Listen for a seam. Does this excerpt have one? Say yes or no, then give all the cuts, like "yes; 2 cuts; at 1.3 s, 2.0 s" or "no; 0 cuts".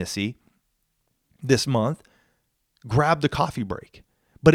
no; 0 cuts